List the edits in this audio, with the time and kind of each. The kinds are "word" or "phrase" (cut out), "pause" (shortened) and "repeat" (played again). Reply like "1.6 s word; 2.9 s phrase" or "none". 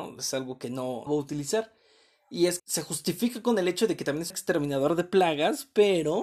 1.1 s word; 2.6 s word; 4.3 s word